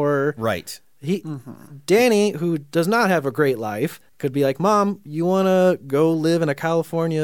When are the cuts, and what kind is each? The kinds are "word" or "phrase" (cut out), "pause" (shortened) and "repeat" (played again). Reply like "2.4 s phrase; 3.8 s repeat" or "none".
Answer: 4.1 s pause